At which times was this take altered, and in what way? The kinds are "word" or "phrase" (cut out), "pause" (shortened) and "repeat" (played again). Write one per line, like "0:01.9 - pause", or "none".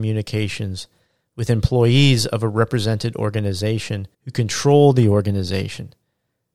0:04.1 - pause